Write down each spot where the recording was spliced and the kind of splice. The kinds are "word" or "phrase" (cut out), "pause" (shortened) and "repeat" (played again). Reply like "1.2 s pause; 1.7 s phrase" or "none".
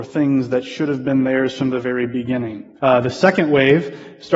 2.8 s pause